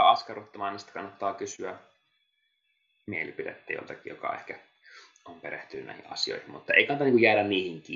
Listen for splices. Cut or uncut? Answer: uncut